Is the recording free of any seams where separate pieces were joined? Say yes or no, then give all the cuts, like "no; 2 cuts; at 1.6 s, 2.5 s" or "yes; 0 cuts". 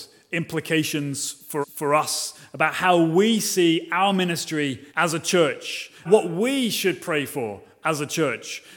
no; 3 cuts; at 1.6 s, 4.9 s, 6.0 s